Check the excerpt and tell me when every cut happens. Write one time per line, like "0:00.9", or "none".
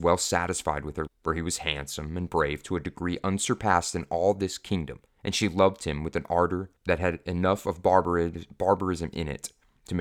0:01.1
0:05.1
0:06.8